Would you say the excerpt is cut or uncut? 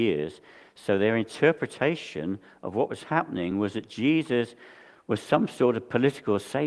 uncut